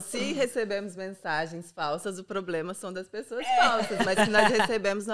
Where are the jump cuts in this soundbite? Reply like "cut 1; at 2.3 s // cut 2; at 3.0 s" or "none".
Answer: none